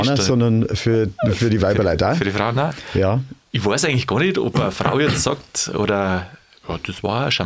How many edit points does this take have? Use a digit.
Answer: 0